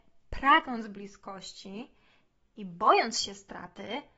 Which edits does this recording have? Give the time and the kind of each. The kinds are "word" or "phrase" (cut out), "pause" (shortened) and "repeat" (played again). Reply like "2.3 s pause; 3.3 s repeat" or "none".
none